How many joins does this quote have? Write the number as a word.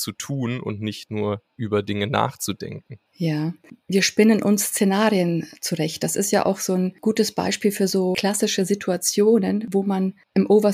one